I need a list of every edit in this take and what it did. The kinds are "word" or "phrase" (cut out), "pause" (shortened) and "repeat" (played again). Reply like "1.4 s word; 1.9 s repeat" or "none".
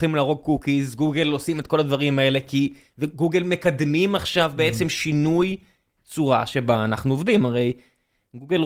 none